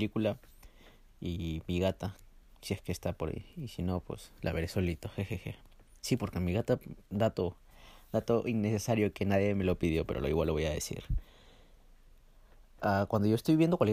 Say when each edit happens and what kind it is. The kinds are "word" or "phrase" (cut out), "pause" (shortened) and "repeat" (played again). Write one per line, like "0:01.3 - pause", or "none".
none